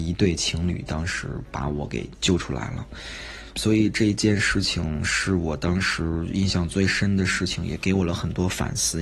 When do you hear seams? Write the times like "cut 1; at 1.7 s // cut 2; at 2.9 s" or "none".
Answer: cut 1; at 3.6 s